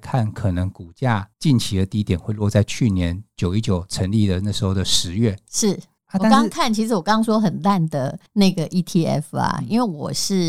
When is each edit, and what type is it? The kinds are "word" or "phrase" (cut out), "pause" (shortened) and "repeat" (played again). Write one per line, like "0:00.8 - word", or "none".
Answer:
0:01.3 - pause
0:06.0 - pause
0:08.3 - pause